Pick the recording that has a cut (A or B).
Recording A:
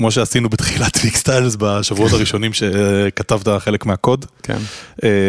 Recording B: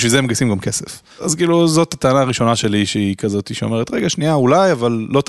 B